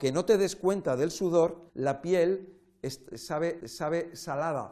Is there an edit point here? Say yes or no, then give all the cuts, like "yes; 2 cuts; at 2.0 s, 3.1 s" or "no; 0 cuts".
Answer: yes; 2 cuts; at 1.7 s, 3.6 s